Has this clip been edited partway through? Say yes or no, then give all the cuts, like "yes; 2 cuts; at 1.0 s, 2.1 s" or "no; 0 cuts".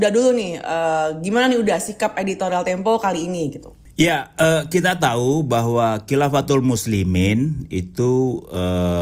no; 0 cuts